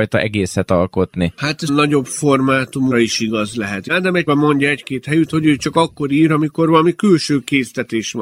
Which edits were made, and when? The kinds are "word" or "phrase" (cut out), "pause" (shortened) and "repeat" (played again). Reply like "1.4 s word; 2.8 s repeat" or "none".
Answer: 1.7 s phrase; 2.9 s word; 4.3 s phrase